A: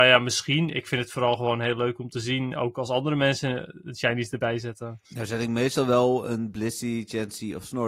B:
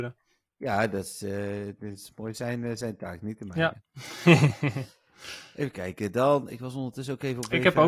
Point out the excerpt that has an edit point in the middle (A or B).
A